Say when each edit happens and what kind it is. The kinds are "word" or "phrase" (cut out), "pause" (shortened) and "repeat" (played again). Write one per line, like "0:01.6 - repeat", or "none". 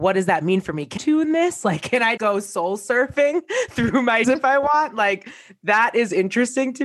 0:01.0 - phrase
0:02.2 - word
0:04.2 - word

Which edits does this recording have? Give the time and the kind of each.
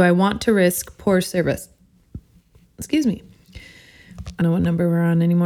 0:04.4 - word

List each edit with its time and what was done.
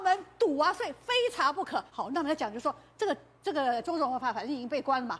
0:01.9 - pause

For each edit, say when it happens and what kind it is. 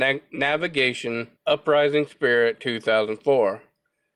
0:01.4 - pause

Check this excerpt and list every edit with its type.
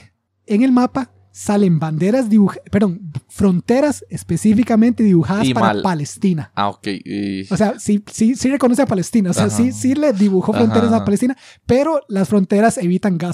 none

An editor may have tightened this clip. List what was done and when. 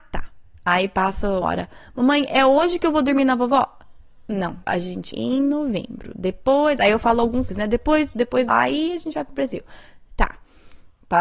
0:01.4 - word
0:04.6 - word
0:05.1 - word
0:07.5 - word
0:08.1 - word
0:08.5 - word

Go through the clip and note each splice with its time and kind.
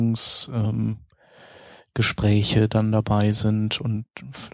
none

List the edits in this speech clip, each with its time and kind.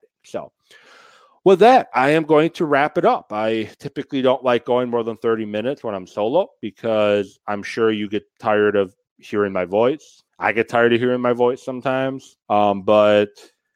0:10.3 - pause
0:12.4 - pause

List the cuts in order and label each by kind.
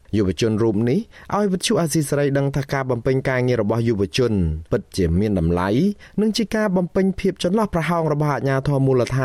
0:04.7 - pause

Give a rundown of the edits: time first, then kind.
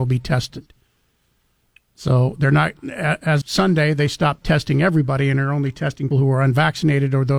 0:03.4 - word
0:06.1 - word

